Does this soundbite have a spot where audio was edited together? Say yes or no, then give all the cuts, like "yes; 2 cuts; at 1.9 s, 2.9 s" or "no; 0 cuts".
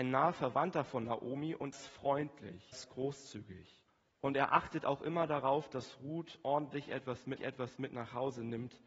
yes; 4 cuts; at 1.7 s, 2.7 s, 3.9 s, 7.4 s